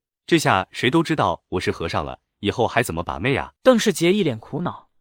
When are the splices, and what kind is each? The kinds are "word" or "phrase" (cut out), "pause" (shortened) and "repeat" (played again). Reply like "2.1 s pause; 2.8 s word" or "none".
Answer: 3.6 s pause